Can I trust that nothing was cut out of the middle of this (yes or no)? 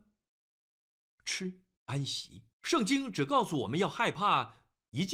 no